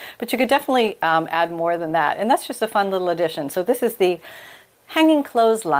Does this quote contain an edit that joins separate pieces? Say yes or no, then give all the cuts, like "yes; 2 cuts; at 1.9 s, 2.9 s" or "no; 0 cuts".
no; 0 cuts